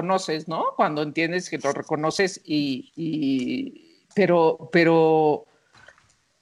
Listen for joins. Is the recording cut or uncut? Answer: uncut